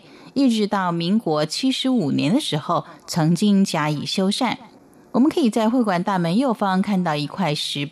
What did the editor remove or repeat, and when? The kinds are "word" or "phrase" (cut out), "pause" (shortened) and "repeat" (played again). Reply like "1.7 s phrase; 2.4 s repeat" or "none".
none